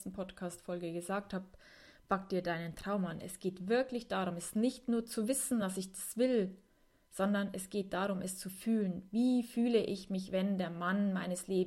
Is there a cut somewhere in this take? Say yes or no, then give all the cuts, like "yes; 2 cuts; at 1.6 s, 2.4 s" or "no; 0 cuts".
no; 0 cuts